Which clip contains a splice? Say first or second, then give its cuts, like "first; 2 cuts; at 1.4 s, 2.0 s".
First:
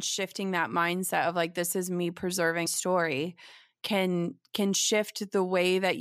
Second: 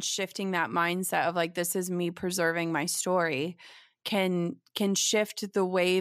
first; 1 cut; at 2.7 s